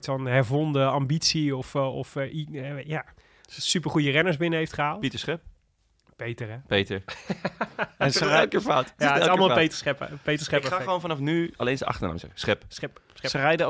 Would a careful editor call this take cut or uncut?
uncut